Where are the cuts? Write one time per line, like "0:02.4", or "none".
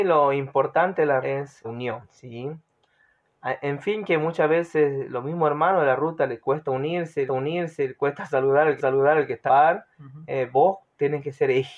0:01.2
0:01.6
0:02.0
0:07.3
0:08.8
0:09.5
0:09.9